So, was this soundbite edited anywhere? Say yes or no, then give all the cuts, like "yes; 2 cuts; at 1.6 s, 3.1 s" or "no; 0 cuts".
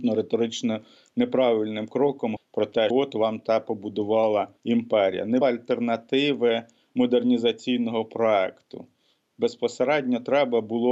yes; 4 cuts; at 2.4 s, 2.9 s, 4.6 s, 5.4 s